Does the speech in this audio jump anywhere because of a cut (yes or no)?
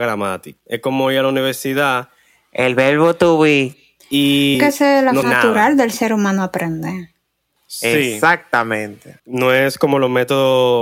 yes